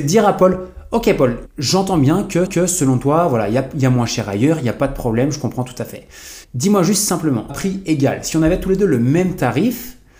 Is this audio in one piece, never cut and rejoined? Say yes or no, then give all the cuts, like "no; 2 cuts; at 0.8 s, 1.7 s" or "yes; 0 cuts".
no; 4 cuts; at 1.4 s, 2.5 s, 6.4 s, 7.5 s